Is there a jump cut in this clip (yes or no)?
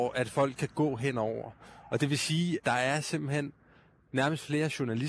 yes